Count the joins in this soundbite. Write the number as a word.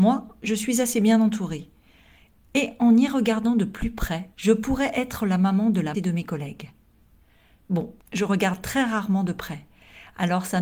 three